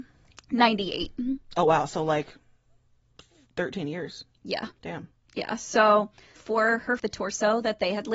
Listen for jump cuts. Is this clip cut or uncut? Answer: cut